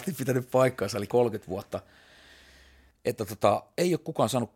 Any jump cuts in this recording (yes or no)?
yes